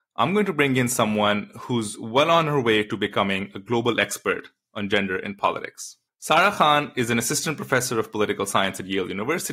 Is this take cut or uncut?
cut